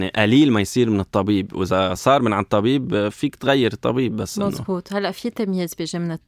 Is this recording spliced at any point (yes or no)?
no